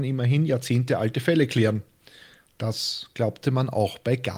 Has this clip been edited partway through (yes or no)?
no